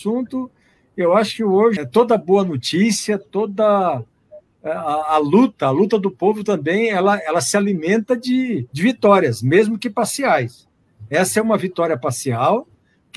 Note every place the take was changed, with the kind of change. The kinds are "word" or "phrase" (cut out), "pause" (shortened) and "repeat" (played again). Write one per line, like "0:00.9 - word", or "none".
0:01.8 - phrase
0:08.7 - pause